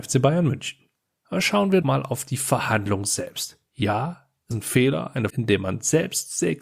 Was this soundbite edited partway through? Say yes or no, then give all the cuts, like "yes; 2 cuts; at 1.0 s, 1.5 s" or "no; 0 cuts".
yes; 5 cuts; at 1.0 s, 1.8 s, 3.7 s, 4.5 s, 5.3 s